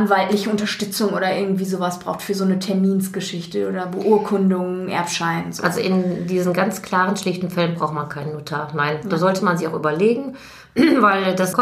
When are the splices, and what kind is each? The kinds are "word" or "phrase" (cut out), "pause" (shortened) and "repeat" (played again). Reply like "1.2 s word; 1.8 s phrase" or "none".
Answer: none